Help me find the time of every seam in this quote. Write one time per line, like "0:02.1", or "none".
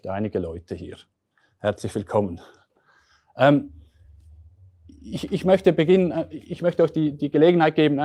none

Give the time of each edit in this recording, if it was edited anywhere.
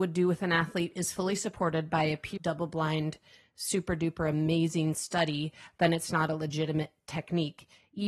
0:02.4

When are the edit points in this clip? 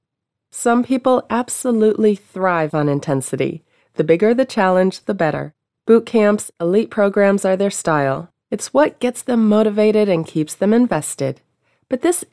none

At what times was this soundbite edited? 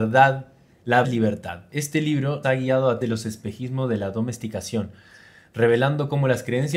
0:01.0
0:02.4
0:03.0

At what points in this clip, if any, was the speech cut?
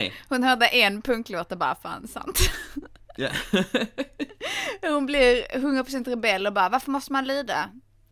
none

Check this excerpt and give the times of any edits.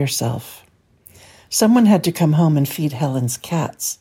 none

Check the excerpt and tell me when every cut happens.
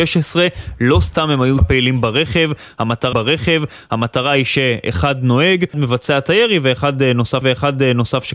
0:01.6
0:03.1
0:05.7
0:07.4

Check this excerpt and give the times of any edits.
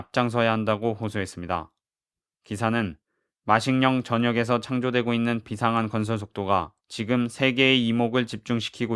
none

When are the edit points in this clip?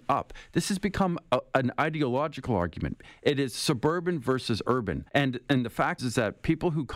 0:05.1
0:06.0

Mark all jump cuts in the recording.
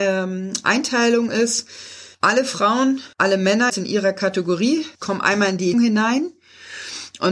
0:02.1
0:03.1
0:03.7
0:04.9
0:05.7

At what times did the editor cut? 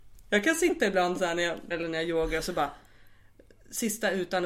0:01.7

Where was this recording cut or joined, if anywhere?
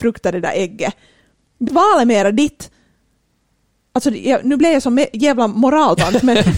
0:01.7

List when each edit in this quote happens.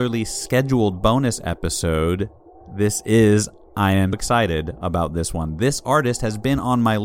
0:03.6
0:04.1

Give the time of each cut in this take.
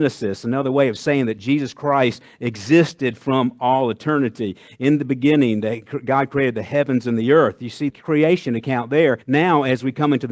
0:07.9
0:09.2

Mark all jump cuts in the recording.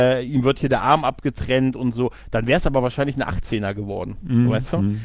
none

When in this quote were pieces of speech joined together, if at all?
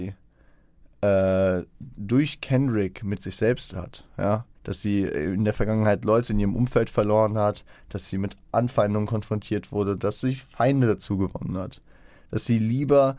0:04.5

